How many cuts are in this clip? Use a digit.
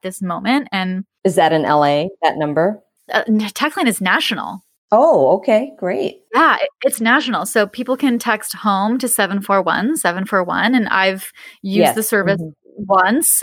0